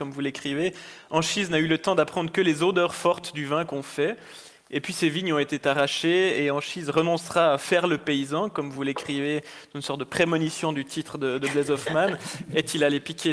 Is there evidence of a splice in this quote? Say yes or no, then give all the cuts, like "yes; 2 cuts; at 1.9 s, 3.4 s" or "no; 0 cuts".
no; 0 cuts